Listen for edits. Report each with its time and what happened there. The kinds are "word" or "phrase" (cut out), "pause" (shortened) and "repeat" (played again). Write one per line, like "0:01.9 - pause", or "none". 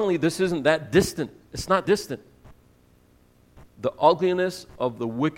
0:01.8 - word